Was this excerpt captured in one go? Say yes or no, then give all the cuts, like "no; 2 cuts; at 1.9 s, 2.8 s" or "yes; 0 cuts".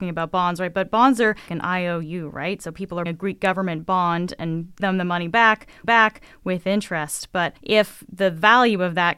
no; 5 cuts; at 1.5 s, 3.1 s, 4.8 s, 5.8 s, 7.6 s